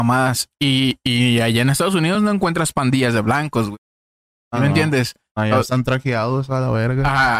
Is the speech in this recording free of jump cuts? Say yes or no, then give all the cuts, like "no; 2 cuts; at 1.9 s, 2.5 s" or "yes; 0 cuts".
yes; 0 cuts